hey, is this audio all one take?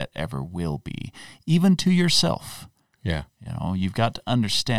yes; 0 cuts

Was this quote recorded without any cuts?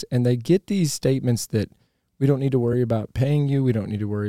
yes; 0 cuts

